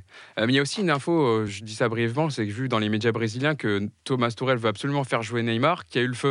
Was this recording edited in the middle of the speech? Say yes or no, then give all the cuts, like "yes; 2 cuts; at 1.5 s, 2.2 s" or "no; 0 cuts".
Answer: yes; 1 cut; at 1.5 s